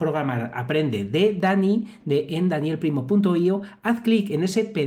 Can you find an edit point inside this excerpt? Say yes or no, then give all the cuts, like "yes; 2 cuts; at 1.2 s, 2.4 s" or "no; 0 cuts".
no; 0 cuts